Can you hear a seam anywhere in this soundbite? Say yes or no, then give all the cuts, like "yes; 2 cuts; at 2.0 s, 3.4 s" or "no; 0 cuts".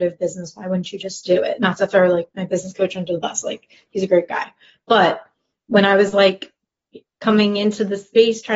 no; 0 cuts